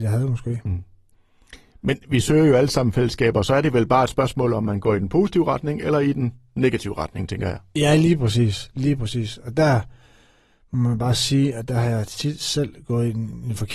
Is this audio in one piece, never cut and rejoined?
yes; 0 cuts

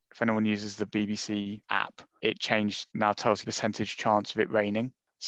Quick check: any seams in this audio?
yes; 3 cuts; at 1.6 s, 2.9 s, 3.4 s

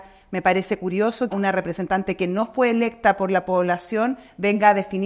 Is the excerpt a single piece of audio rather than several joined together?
no; 1 cut; at 1.3 s

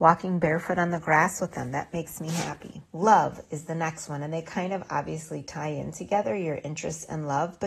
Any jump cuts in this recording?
yes; 1 cut; at 2.9 s

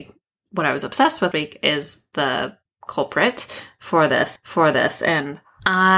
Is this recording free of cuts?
no; 3 cuts; at 1.3 s, 2.7 s, 4.4 s

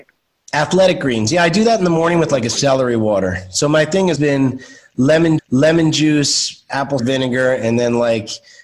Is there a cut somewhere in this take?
yes; 3 cuts; at 4.2 s, 5.4 s, 7.0 s

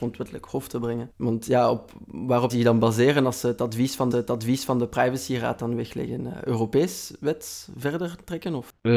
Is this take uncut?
no; 2 cuts; at 2.5 s, 4.1 s

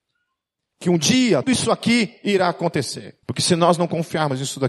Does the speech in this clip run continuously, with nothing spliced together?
no; 2 cuts; at 1.4 s, 3.2 s

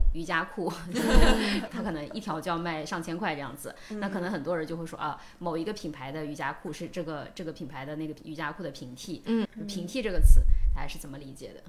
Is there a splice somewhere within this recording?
yes; 1 cut; at 1.7 s

